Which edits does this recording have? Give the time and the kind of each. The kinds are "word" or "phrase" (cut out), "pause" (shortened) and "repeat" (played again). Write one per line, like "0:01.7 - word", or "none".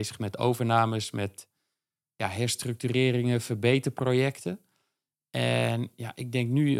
none